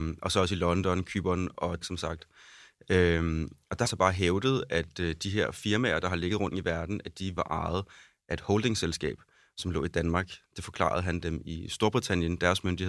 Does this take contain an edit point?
yes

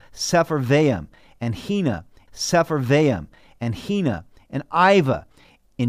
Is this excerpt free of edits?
no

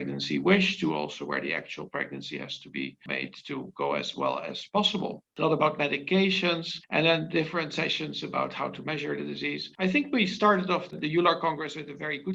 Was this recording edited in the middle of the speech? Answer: no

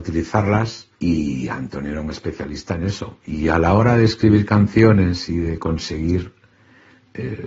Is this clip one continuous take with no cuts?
no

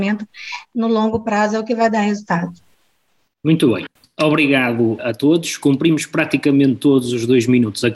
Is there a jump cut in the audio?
no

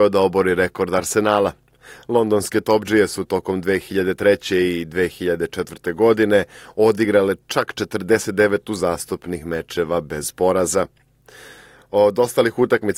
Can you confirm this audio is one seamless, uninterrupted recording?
yes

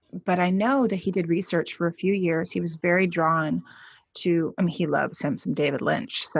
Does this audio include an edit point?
no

